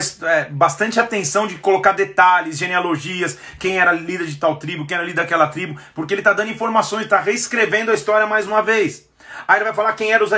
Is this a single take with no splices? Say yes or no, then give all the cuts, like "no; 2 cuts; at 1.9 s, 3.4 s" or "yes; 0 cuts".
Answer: yes; 0 cuts